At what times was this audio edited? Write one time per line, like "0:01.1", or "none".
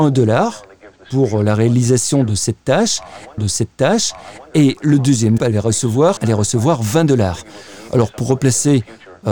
0:03.4
0:05.4
0:06.2

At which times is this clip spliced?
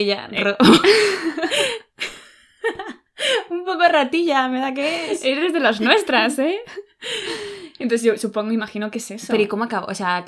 none

